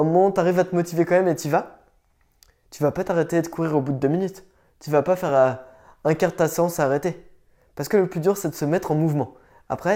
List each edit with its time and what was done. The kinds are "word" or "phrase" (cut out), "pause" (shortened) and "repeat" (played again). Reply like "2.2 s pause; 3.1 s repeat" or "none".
none